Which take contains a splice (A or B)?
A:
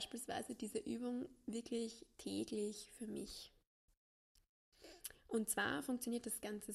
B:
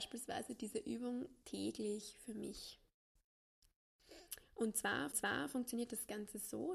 B